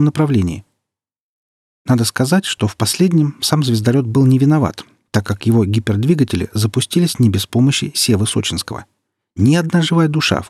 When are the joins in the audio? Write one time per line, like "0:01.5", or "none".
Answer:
none

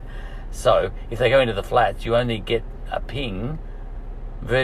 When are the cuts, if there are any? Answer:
none

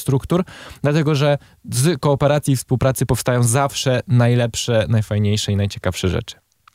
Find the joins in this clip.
none

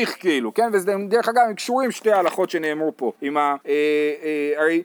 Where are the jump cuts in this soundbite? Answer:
0:03.1
0:03.6

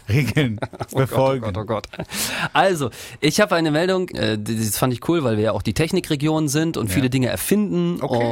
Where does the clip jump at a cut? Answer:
0:04.1

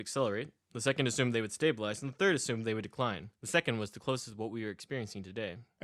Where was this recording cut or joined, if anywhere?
0:03.3

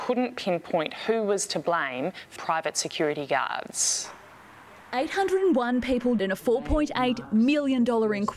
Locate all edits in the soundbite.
0:02.4
0:06.2

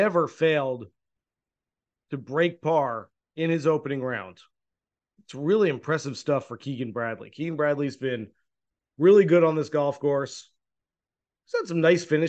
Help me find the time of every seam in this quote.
0:03.2

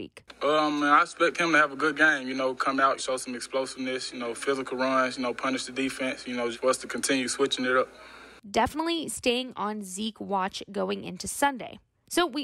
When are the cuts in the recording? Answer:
0:03.0
0:06.5

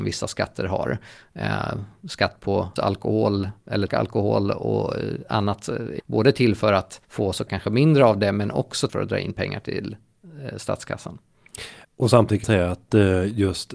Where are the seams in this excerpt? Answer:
0:02.8
0:03.9
0:06.0
0:07.0
0:07.5
0:08.9
0:11.8
0:12.4

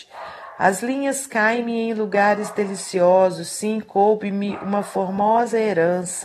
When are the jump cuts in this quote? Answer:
none

